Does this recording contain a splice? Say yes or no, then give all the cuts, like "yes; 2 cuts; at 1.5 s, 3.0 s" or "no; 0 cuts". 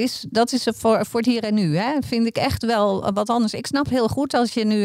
no; 0 cuts